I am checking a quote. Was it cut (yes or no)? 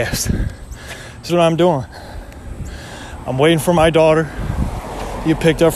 yes